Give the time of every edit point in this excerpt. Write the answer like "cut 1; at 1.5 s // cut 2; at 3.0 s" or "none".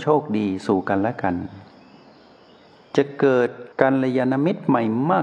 cut 1; at 3.7 s